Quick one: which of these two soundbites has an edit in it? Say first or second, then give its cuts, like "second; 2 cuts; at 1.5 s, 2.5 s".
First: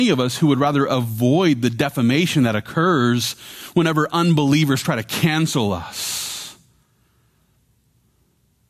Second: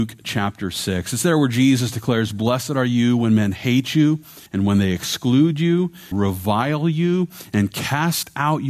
second; 2 cuts; at 4.5 s, 6.1 s